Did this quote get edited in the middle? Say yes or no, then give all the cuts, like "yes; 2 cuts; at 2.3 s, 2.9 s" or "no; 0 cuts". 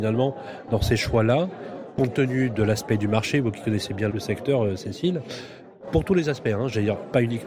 yes; 1 cut; at 4.1 s